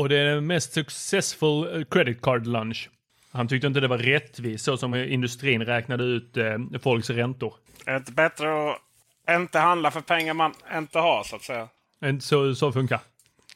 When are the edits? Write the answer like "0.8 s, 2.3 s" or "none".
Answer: none